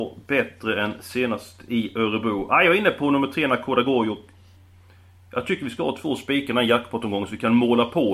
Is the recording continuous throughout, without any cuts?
yes; 0 cuts

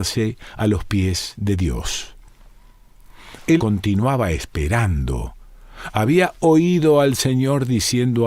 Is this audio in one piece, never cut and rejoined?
no; 1 cut; at 3.6 s

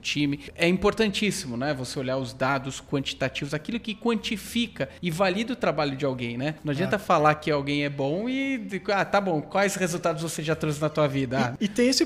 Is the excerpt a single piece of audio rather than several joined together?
yes; 0 cuts

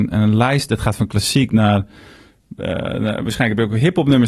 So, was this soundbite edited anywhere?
no; 0 cuts

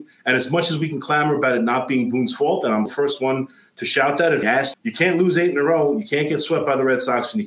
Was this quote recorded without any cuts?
no; 3 cuts; at 2.9 s, 4.4 s, 4.7 s

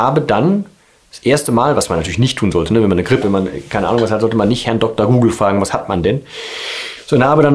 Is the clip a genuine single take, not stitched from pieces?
no; 1 cut; at 3.2 s

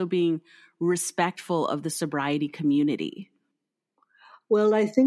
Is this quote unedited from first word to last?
yes; 0 cuts

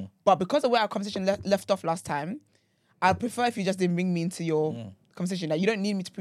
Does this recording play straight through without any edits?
yes; 0 cuts

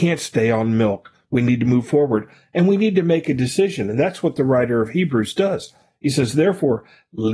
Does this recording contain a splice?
no; 0 cuts

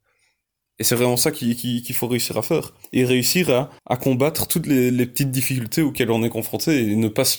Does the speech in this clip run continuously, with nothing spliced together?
no; 2 cuts; at 2.8 s, 3.8 s

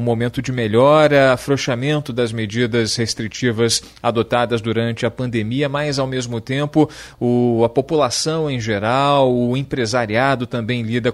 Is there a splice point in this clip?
no; 0 cuts

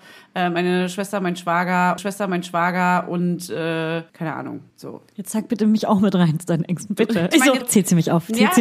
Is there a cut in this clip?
yes; 5 cuts; at 2.0 s, 4.1 s, 4.7 s, 7.3 s, 7.6 s

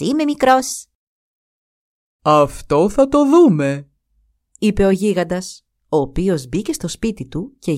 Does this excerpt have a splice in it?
no; 0 cuts

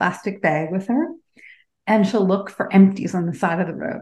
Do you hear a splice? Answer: no; 0 cuts

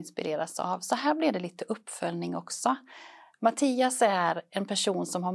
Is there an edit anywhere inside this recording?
no; 0 cuts

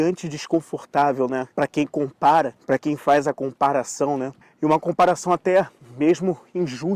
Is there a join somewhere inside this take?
yes; 3 cuts; at 1.5 s, 2.6 s, 4.4 s

